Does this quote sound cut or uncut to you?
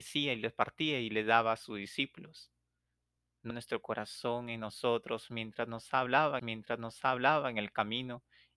cut